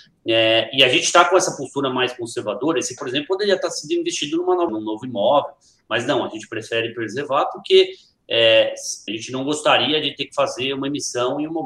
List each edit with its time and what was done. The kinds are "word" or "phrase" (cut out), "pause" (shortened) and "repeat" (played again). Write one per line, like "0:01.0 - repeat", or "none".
0:03.0 - word
0:04.7 - word
0:09.1 - word